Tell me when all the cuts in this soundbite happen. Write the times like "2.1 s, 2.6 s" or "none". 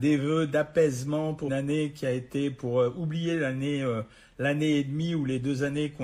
1.5 s